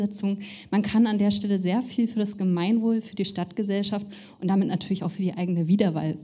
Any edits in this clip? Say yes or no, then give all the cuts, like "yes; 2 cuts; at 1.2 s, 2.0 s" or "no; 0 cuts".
no; 0 cuts